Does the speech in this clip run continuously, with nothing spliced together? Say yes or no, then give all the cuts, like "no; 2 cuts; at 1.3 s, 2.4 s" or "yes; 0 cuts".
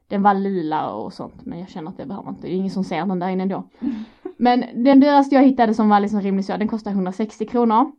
yes; 0 cuts